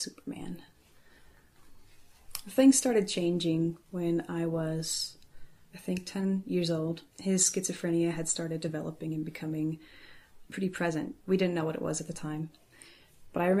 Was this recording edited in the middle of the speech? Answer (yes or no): yes